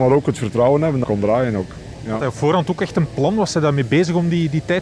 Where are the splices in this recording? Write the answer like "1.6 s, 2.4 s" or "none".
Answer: 1.0 s